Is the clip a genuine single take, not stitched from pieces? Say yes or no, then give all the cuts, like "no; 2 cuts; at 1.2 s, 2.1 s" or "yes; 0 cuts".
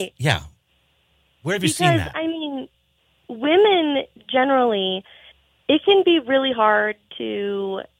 yes; 0 cuts